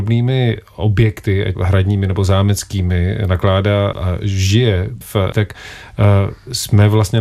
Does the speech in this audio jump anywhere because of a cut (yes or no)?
yes